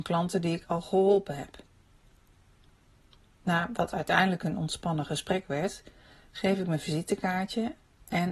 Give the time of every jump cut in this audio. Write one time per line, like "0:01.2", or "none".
none